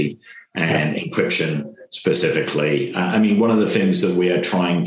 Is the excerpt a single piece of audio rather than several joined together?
yes; 0 cuts

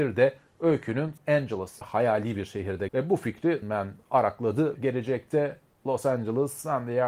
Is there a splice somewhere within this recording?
yes; 5 cuts; at 1.2 s, 1.8 s, 2.9 s, 3.6 s, 4.8 s

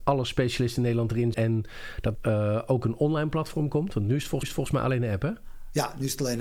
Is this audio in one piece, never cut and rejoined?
no; 3 cuts; at 1.3 s, 2.1 s, 4.4 s

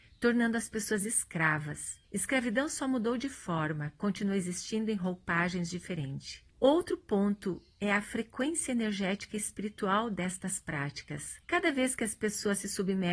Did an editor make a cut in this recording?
yes; 3 cuts; at 2.0 s, 6.5 s, 11.4 s

